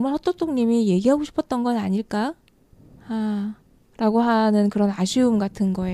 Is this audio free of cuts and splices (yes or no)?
yes